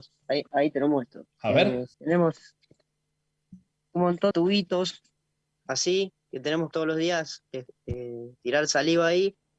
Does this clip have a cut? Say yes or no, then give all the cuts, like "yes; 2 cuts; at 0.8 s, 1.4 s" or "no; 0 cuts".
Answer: yes; 6 cuts; at 1.3 s, 1.9 s, 4.3 s, 6.2 s, 6.7 s, 8.4 s